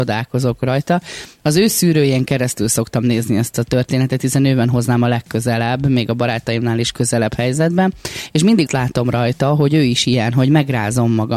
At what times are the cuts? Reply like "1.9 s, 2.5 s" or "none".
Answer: 8.7 s